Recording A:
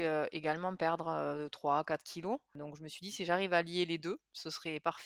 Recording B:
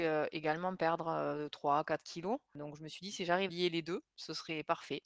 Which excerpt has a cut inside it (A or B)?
B